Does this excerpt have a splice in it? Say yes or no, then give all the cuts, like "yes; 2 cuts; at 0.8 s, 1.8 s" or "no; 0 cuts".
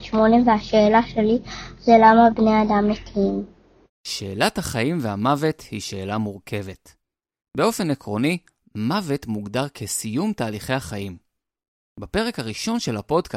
no; 0 cuts